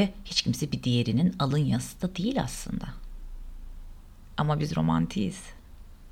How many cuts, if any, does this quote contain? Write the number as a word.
zero